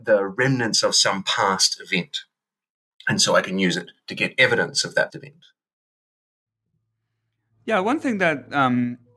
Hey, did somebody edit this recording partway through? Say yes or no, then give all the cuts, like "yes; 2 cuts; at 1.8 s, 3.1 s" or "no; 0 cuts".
yes; 1 cut; at 5.1 s